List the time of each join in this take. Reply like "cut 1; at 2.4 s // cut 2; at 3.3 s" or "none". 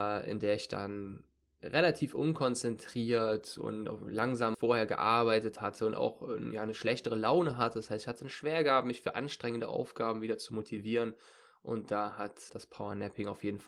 cut 1; at 4.5 s // cut 2; at 12.5 s